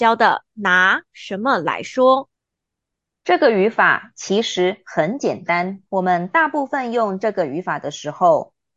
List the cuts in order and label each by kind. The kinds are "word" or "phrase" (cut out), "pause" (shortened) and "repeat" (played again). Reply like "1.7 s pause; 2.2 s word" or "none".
2.4 s pause; 5.9 s pause